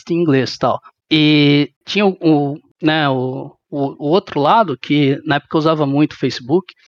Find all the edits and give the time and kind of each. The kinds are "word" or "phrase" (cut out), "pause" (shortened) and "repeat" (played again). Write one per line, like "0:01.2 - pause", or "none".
none